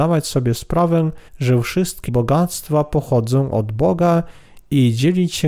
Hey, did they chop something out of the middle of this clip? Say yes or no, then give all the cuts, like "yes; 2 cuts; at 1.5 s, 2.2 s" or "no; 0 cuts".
yes; 2 cuts; at 1.3 s, 2.1 s